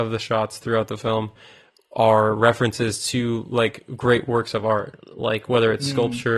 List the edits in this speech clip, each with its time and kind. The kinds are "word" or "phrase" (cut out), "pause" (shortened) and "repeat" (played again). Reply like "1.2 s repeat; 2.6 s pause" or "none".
none